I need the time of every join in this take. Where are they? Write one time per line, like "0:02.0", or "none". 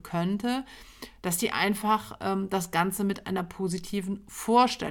none